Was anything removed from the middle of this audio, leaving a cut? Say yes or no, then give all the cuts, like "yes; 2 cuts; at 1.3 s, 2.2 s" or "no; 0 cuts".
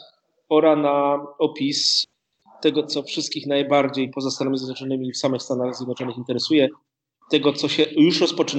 no; 0 cuts